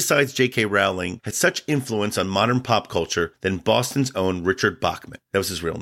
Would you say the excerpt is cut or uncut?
cut